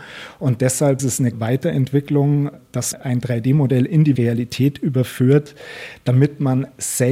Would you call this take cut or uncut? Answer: cut